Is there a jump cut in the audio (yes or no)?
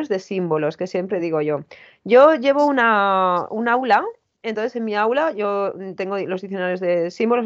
no